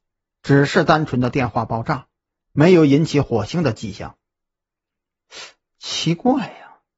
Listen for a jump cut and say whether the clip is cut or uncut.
uncut